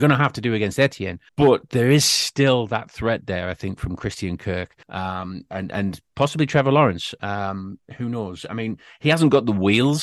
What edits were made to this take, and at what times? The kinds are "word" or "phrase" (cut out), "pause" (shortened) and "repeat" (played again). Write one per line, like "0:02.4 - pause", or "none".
0:01.3 - pause
0:04.8 - pause